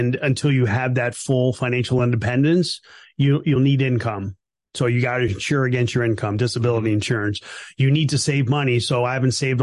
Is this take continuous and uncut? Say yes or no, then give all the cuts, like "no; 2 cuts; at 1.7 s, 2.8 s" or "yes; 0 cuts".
yes; 0 cuts